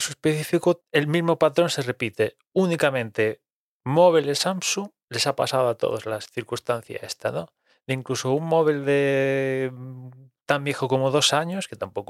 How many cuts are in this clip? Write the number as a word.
zero